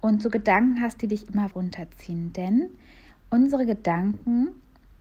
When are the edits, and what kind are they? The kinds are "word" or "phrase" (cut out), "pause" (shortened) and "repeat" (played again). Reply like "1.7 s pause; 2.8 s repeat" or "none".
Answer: 1.5 s word